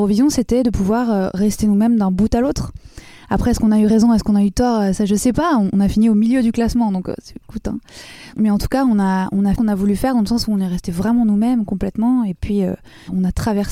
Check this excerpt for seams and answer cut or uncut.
cut